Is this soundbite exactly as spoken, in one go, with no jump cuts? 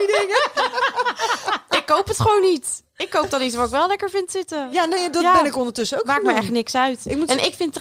yes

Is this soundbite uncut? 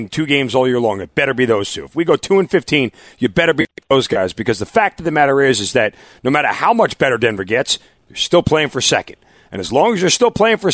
yes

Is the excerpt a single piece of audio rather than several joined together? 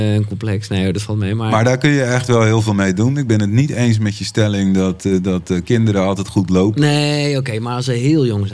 yes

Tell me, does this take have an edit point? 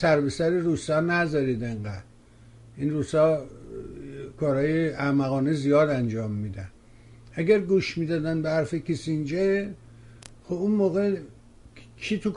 no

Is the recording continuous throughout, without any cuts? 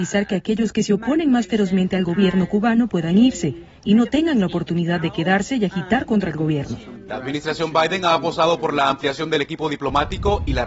yes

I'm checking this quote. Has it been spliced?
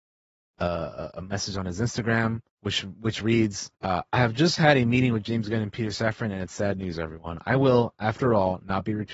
yes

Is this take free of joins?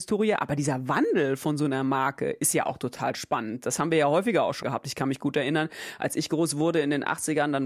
no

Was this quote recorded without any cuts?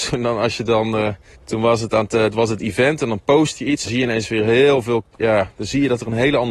no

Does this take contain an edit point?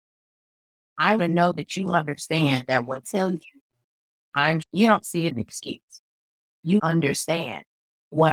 yes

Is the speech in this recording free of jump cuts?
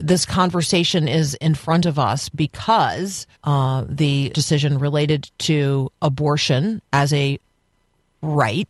no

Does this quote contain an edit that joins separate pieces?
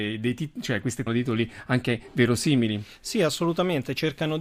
yes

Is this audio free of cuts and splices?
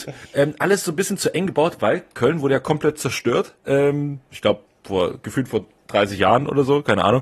no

